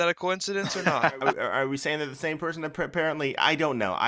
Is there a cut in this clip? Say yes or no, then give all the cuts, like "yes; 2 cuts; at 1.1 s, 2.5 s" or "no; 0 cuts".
no; 0 cuts